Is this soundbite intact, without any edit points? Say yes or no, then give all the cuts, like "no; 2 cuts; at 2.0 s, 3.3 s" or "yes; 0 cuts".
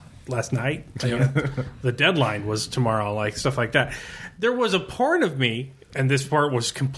yes; 0 cuts